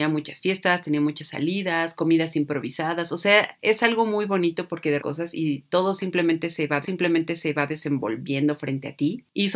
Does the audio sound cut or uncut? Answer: cut